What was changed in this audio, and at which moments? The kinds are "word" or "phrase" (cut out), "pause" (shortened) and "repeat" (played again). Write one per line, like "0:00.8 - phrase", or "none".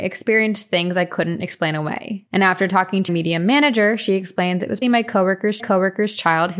0:03.1 - word
0:04.8 - word
0:05.6 - repeat